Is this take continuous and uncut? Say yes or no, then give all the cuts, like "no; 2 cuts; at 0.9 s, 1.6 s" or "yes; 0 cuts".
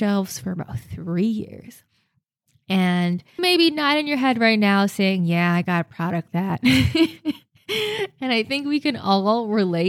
no; 2 cuts; at 3.4 s, 6.3 s